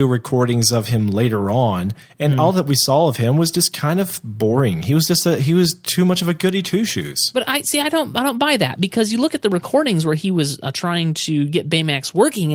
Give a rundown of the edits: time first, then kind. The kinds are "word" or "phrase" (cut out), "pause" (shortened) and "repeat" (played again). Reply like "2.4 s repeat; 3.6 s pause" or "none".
none